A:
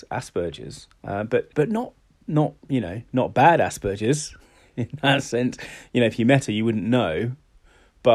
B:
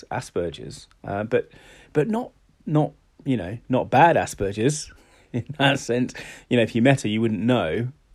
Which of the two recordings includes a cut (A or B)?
A